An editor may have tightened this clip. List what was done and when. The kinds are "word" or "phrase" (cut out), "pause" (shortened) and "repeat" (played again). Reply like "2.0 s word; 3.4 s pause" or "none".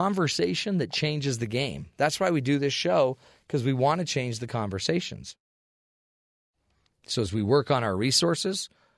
none